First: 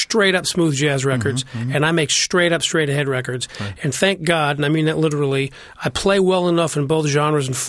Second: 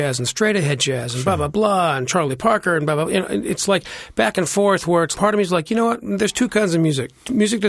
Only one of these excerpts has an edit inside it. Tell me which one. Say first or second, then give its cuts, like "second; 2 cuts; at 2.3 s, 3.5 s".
second; 1 cut; at 5.1 s